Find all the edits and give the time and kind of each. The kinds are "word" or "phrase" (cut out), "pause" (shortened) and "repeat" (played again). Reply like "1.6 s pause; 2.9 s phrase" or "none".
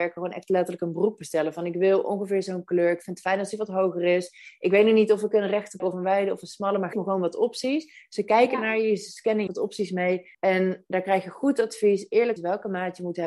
5.8 s word; 6.9 s word; 9.5 s phrase; 10.3 s pause; 12.4 s word